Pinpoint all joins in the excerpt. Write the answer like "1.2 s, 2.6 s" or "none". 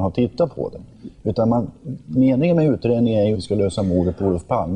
3.3 s